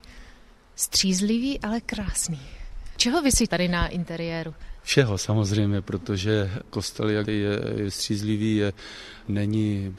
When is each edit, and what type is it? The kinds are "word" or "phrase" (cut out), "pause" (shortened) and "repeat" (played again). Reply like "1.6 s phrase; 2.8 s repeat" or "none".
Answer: 3.5 s word; 7.2 s word